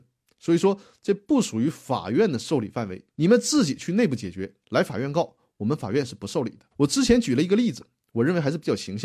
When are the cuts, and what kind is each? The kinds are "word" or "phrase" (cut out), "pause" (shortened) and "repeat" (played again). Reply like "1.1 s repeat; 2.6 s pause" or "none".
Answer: 3.1 s pause; 4.6 s pause; 6.7 s pause